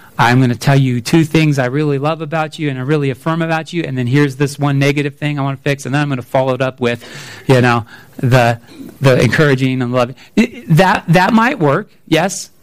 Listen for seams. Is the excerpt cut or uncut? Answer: cut